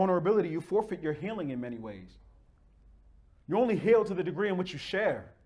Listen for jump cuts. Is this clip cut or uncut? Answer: uncut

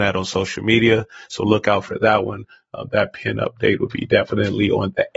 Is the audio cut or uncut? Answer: uncut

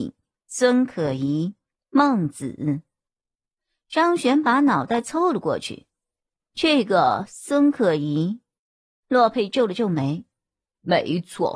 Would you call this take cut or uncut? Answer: uncut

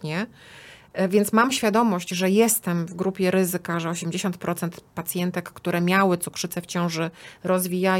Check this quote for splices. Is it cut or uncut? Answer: uncut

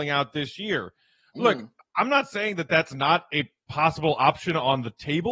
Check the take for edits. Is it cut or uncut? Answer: uncut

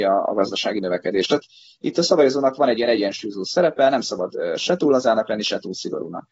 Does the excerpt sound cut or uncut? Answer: uncut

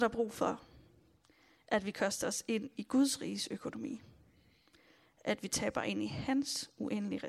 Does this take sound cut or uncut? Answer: uncut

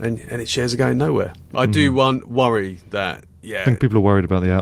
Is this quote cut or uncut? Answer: cut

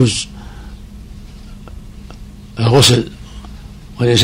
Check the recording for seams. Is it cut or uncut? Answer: uncut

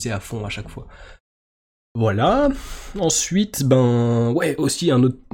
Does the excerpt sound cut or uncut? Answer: uncut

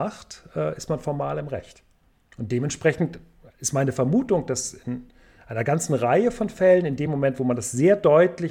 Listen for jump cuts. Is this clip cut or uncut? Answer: uncut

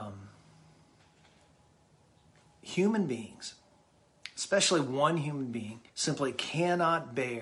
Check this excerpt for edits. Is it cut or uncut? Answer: cut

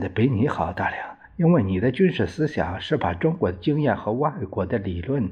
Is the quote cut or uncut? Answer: uncut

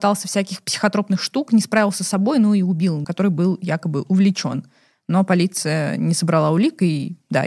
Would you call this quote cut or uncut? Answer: cut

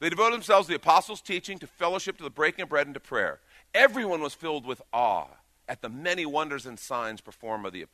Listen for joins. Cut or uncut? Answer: uncut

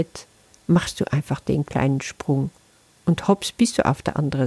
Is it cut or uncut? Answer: uncut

